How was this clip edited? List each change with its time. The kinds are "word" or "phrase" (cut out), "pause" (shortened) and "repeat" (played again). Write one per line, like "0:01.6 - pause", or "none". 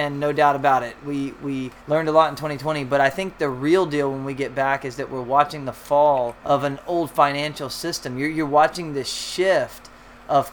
0:01.8 - pause
0:06.4 - pause